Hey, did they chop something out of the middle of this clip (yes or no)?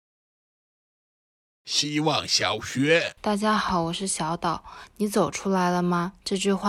yes